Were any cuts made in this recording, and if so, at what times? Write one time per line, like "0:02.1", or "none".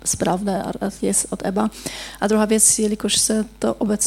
none